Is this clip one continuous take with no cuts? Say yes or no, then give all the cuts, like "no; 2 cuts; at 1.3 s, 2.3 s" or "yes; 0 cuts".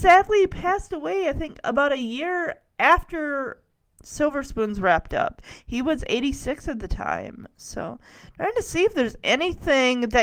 yes; 0 cuts